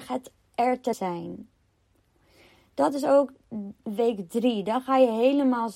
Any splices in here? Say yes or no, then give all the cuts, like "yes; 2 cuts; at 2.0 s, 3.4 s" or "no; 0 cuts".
yes; 1 cut; at 0.9 s